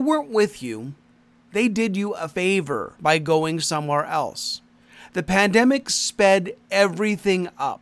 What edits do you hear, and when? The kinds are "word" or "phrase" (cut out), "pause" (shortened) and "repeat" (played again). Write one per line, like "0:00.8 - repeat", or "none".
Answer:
none